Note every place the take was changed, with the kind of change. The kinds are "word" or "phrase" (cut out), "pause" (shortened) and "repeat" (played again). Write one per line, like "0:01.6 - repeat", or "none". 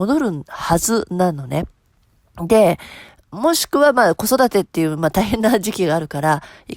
none